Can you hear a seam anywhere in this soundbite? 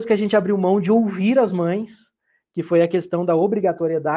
no; 0 cuts

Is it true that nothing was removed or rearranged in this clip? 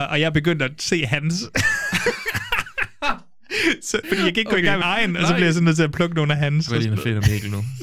no; 3 cuts; at 4.0 s, 4.8 s, 6.7 s

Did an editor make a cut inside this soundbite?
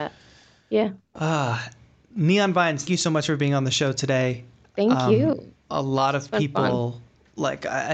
yes; 1 cut; at 2.9 s

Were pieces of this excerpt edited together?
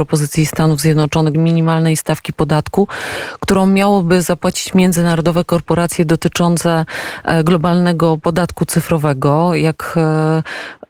yes; 1 cut; at 1.3 s

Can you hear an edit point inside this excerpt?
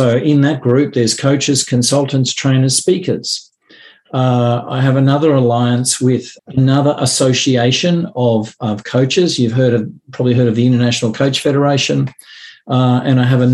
yes; 1 cut; at 6.4 s

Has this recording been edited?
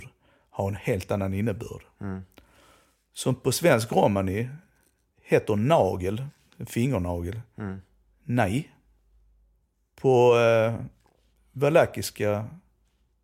no; 0 cuts

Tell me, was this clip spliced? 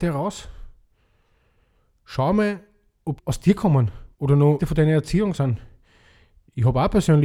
yes; 3 cuts; at 3.2 s, 4.1 s, 4.6 s

